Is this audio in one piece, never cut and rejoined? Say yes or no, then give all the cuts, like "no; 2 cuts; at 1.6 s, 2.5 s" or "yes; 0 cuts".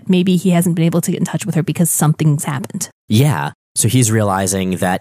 yes; 0 cuts